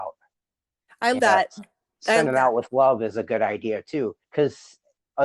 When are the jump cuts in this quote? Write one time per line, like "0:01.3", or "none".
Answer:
0:01.2
0:02.3
0:04.2